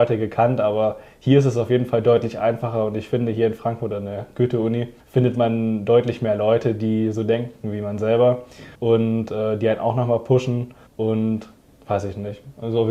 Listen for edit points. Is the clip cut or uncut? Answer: cut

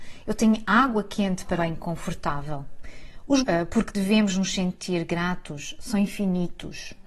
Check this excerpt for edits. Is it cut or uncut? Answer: cut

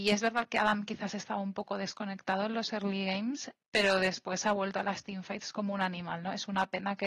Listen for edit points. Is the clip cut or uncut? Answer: uncut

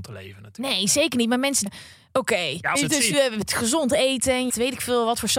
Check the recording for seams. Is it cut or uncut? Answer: cut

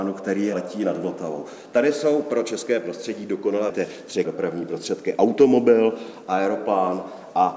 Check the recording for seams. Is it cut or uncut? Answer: cut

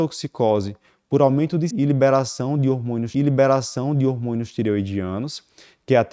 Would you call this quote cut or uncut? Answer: cut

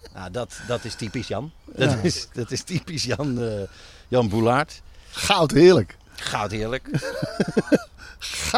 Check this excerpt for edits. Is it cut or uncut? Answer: uncut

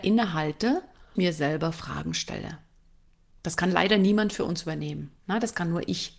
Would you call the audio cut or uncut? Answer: cut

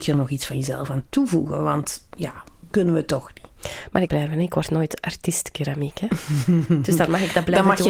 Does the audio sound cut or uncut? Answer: cut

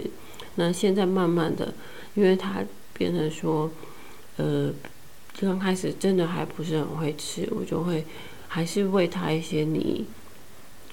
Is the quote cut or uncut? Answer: uncut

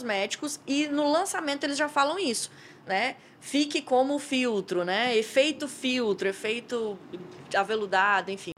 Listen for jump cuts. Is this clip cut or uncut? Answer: uncut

